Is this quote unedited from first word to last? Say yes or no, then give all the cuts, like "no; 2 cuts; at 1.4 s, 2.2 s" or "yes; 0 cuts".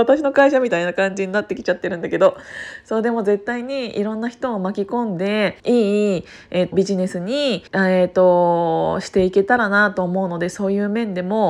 no; 3 cuts; at 5.6 s, 6.7 s, 7.7 s